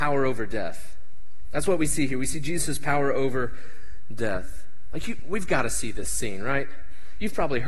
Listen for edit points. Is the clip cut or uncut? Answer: uncut